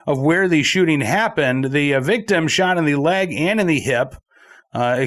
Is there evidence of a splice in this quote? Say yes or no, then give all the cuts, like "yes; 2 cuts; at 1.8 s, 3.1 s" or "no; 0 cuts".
no; 0 cuts